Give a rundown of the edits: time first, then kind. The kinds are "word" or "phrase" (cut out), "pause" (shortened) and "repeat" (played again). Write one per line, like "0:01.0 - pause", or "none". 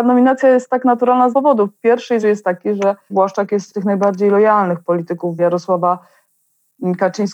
0:01.3 - word
0:02.2 - word
0:03.1 - word
0:03.7 - word
0:05.4 - word

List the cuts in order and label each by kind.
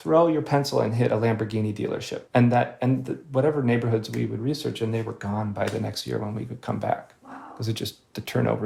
0:02.3 - pause

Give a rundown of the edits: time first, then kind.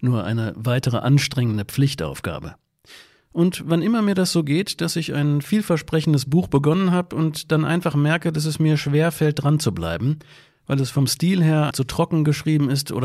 0:11.7 - word

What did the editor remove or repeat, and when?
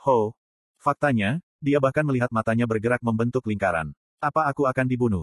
none

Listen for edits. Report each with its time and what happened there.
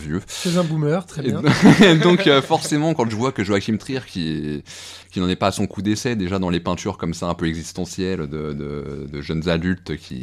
0:05.0 - pause

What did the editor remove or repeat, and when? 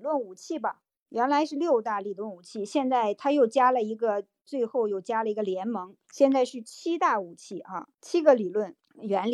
0:06.0 - pause
0:07.9 - pause

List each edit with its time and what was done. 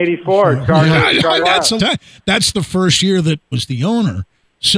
0:01.4 - word
0:01.8 - word
0:03.5 - word

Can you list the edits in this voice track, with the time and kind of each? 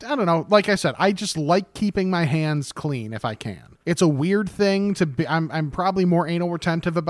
0:03.8 - pause

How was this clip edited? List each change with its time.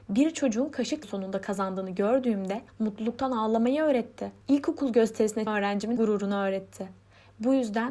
0:01.0 - phrase
0:02.7 - pause
0:04.4 - pause
0:05.5 - word
0:06.0 - word

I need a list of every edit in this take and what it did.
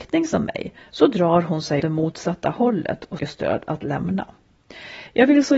0:01.8 - word
0:03.2 - word

